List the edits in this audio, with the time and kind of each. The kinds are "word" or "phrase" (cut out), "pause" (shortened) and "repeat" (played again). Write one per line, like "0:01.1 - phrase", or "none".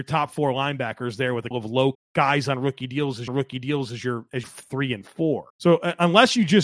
0:01.5 - word
0:01.9 - word
0:03.3 - repeat
0:04.4 - phrase
0:05.5 - pause